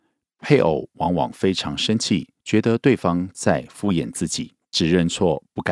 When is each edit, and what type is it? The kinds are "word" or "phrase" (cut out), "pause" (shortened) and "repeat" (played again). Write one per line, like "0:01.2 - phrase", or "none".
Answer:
0:02.4 - pause
0:04.6 - pause